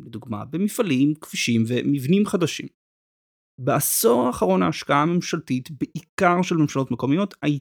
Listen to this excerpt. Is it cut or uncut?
uncut